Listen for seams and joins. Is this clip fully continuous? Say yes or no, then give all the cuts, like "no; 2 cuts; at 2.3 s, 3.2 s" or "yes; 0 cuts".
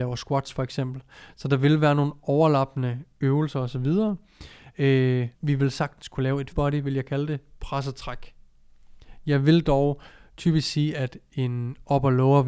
no; 2 cuts; at 5.3 s, 6.5 s